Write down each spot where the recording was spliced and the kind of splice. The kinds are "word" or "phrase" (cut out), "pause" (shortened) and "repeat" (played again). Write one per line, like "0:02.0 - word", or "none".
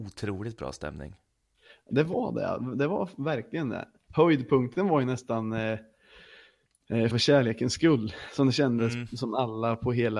0:07.1 - word